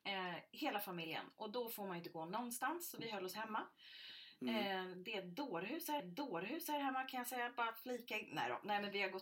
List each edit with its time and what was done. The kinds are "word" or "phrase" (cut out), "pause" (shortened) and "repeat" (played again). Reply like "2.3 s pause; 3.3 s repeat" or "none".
6.0 s repeat